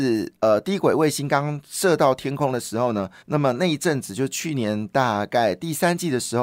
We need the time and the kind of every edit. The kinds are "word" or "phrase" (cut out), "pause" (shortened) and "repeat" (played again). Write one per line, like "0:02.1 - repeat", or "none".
0:03.2 - pause